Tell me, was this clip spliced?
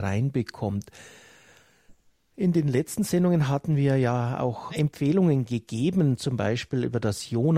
yes; 1 cut; at 4.7 s

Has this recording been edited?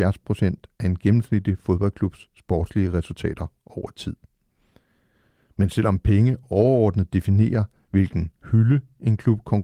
no; 0 cuts

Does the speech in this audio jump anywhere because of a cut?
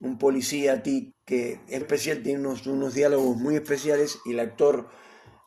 yes; 2 cuts; at 1.1 s, 1.8 s

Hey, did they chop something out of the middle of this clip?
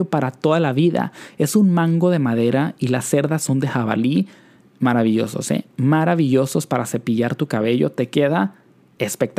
no; 0 cuts

